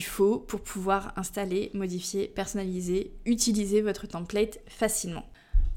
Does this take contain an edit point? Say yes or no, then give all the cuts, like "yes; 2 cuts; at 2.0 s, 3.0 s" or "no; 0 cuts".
no; 0 cuts